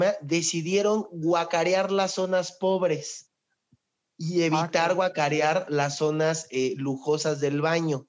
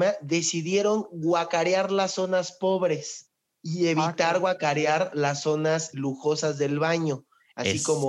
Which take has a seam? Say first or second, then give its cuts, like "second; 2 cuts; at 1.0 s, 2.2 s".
second; 2 cuts; at 3.5 s, 5.9 s